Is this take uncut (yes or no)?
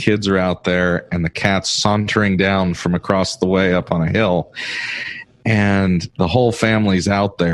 yes